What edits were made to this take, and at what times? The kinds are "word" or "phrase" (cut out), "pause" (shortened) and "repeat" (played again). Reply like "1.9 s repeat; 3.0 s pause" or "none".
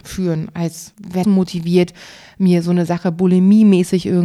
1.2 s phrase